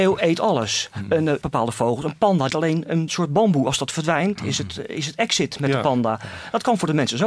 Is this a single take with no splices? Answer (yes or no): no